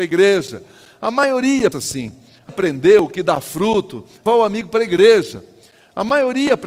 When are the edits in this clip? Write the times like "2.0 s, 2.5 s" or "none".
1.7 s, 2.5 s, 4.3 s